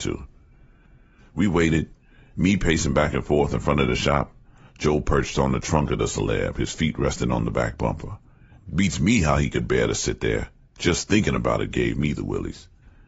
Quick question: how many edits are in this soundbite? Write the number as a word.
zero